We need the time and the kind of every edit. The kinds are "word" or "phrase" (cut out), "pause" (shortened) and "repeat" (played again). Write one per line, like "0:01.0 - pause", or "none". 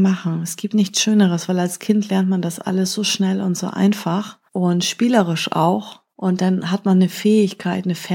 0:04.5 - pause
0:06.1 - pause